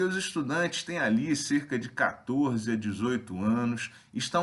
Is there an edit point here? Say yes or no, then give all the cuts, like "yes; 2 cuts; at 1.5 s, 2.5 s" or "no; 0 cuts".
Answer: no; 0 cuts